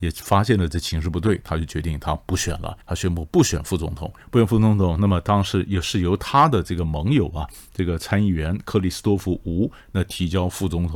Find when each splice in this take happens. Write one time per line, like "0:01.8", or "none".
0:02.8
0:04.2